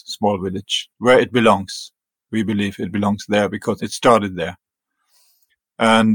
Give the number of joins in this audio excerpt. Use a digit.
1